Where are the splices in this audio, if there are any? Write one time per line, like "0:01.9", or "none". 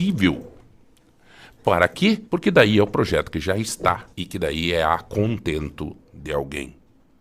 0:02.3
0:04.1